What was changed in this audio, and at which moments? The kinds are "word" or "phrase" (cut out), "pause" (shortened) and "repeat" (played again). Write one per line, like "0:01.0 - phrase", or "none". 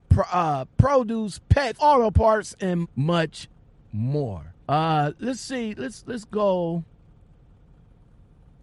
0:01.8 - word
0:02.8 - word
0:04.6 - pause